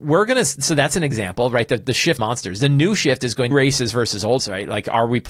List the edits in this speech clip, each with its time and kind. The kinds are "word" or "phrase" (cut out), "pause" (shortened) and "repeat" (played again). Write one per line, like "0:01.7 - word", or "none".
0:02.2 - word
0:03.5 - phrase
0:04.4 - word